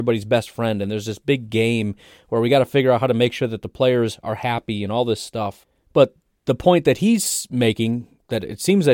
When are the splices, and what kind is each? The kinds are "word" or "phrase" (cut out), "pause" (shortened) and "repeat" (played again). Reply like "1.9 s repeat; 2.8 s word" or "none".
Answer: none